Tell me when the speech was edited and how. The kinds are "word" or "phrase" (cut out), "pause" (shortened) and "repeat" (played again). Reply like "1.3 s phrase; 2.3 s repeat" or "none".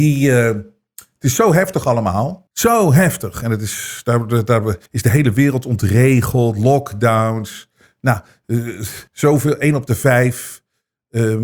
2.5 s pause; 4.9 s pause; 9.1 s pause